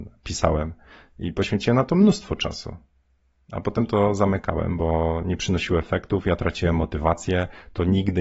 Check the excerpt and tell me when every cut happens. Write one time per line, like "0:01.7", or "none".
none